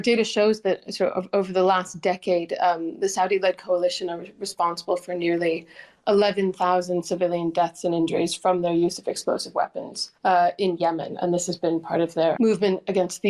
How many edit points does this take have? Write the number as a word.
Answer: two